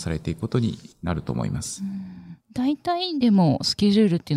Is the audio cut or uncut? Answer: cut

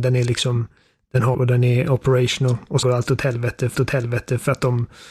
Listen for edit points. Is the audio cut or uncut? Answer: cut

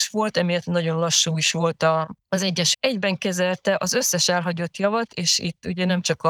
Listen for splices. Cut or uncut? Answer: cut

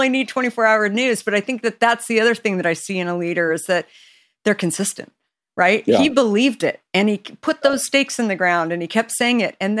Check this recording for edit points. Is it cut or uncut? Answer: uncut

